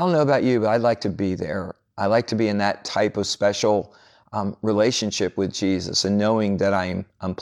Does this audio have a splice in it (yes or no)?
no